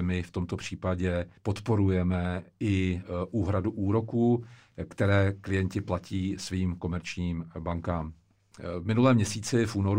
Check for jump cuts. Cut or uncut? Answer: cut